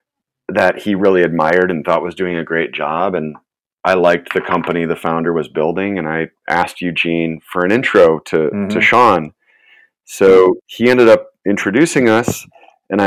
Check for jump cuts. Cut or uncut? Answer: uncut